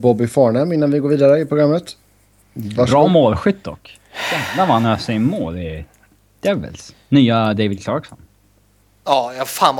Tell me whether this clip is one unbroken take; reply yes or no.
yes